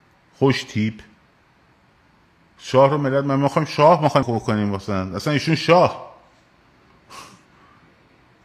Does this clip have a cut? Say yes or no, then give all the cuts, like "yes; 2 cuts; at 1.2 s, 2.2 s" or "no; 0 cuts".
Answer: yes; 1 cut; at 4.2 s